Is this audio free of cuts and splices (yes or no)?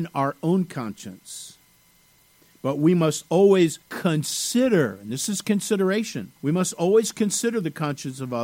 no